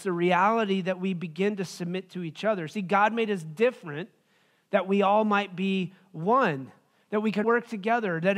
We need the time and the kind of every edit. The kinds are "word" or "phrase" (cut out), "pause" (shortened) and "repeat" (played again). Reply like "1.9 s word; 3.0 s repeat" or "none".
7.4 s word